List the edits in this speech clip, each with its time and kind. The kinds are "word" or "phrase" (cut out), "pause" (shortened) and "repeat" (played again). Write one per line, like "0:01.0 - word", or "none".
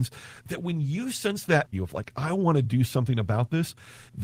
0:01.7 - phrase